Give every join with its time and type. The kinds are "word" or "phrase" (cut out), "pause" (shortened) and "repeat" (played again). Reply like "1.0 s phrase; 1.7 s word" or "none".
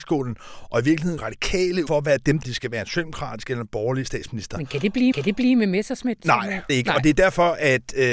1.2 s word; 1.9 s phrase; 2.4 s phrase; 5.1 s repeat; 6.7 s phrase